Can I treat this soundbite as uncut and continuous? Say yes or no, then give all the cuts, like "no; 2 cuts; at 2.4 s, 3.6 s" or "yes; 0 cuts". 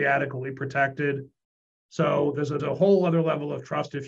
no; 1 cut; at 2.6 s